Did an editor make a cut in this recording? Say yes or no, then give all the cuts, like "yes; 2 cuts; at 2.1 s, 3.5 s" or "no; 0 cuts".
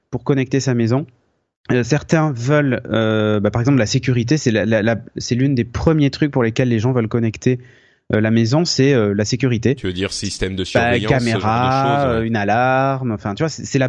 no; 0 cuts